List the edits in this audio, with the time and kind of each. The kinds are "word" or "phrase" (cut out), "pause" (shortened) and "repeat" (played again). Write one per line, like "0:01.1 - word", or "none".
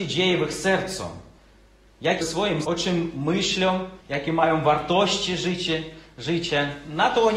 0:02.2 - phrase
0:02.6 - word
0:04.0 - pause